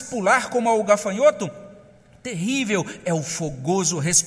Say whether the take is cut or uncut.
uncut